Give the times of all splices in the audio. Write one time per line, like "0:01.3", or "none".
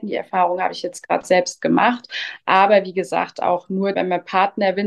0:03.9